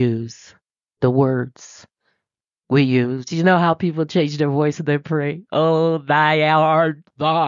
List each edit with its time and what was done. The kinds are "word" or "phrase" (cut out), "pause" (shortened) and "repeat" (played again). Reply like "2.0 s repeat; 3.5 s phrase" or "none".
none